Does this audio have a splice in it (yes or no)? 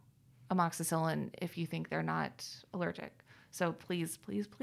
no